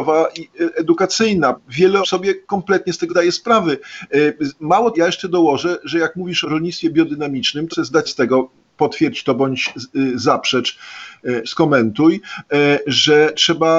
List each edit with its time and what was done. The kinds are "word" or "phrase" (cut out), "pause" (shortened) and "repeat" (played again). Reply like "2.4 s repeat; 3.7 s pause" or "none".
1.5 s word; 2.0 s word; 3.1 s word; 4.9 s word; 6.4 s word; 7.7 s word; 8.1 s word; 11.4 s word